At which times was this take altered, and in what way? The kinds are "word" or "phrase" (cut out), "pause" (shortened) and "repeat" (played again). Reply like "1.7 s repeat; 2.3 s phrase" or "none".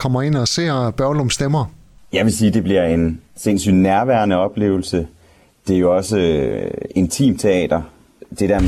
3.3 s pause